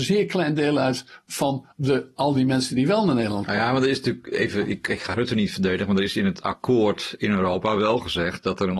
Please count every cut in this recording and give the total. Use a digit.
1